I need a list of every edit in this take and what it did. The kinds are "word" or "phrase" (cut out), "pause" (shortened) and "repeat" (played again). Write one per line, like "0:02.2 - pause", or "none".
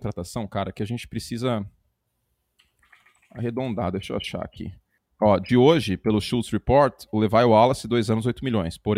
none

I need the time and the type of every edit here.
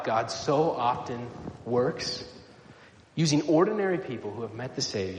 none

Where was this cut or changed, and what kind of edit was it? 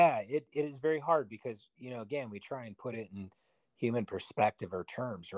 none

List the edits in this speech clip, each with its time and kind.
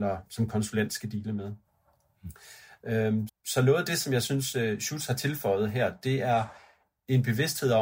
0:03.3 - word

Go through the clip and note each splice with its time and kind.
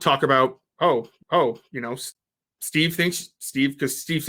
0:01.2 - repeat

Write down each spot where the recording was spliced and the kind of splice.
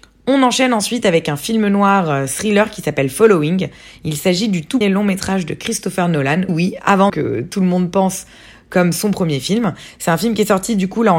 0:04.8 - word
0:06.5 - word
0:07.1 - word

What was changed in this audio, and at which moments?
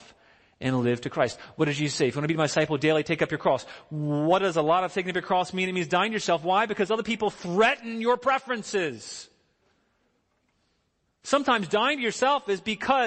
none

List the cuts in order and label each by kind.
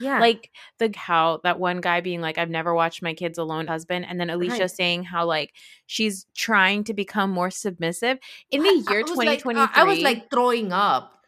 0:00.9 - phrase
0:03.7 - word

